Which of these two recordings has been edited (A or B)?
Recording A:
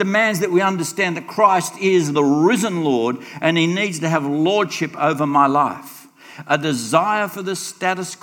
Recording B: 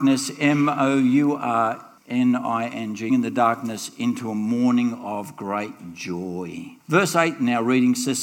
B